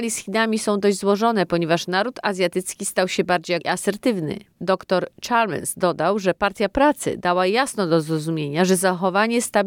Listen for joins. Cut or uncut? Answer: cut